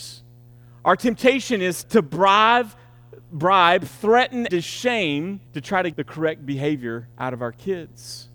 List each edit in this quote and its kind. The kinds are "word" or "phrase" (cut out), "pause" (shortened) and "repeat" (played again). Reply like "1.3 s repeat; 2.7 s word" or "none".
1.8 s word; 4.5 s word; 5.5 s pause; 5.9 s word; 7.1 s pause